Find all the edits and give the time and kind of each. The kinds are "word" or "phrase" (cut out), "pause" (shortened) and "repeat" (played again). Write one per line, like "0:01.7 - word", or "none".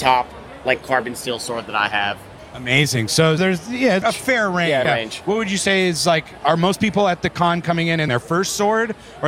0:03.4 - word
0:04.0 - phrase
0:04.8 - word
0:08.1 - phrase